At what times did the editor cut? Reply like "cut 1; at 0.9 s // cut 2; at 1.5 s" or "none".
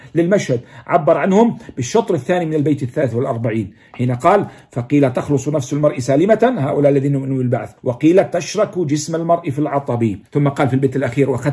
cut 1; at 7.8 s // cut 2; at 10.3 s